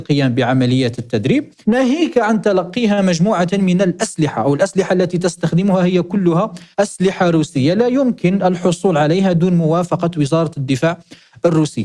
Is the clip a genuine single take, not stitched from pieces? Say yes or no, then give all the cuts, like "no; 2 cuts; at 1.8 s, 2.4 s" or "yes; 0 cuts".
no; 2 cuts; at 1.6 s, 6.7 s